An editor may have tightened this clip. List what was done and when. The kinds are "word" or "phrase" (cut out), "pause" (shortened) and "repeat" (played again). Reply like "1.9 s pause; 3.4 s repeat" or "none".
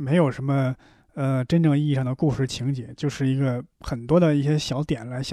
3.7 s pause

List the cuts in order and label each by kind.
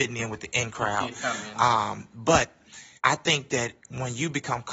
3.0 s pause; 3.8 s pause

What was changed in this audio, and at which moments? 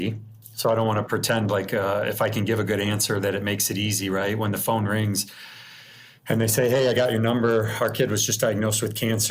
none

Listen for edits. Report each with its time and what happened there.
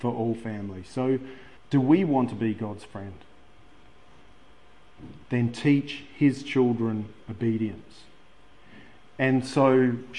1.6 s pause; 5.2 s pause; 7.2 s pause

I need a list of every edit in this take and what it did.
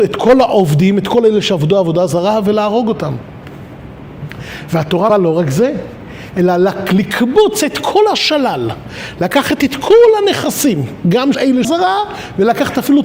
5.1 s word; 11.3 s word; 11.6 s phrase

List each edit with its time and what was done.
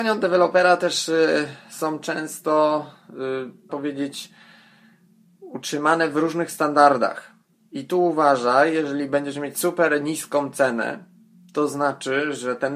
3.7 s word

